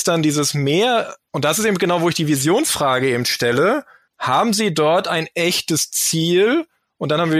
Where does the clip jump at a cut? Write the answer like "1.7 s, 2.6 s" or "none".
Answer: none